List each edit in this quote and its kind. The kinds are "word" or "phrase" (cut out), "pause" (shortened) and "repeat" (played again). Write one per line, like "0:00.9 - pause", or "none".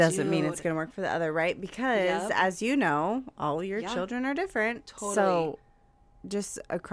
none